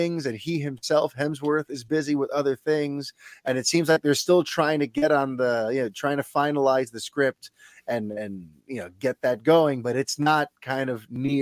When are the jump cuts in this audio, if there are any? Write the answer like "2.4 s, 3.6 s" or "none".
none